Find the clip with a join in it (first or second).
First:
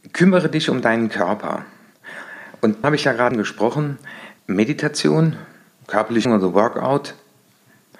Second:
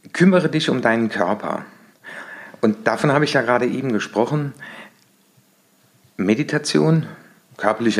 first